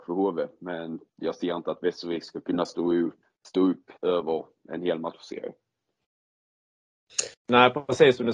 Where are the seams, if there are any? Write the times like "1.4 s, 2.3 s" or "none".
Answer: 1.1 s, 3.2 s, 4.0 s, 7.3 s